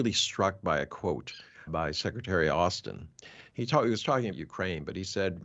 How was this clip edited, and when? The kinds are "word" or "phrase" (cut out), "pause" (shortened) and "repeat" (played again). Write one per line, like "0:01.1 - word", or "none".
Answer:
0:01.7 - word
0:04.3 - word